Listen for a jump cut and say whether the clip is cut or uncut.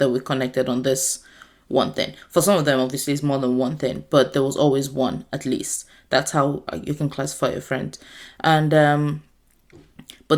uncut